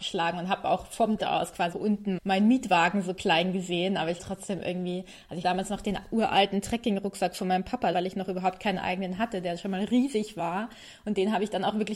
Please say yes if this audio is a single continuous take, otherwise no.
no